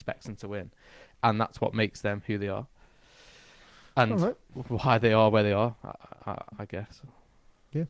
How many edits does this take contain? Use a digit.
0